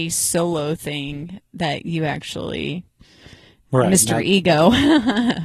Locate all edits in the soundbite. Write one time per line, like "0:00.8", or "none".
none

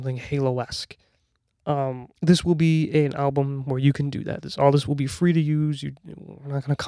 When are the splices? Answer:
0:02.1

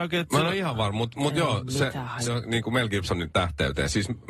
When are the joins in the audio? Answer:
0:02.3
0:03.3

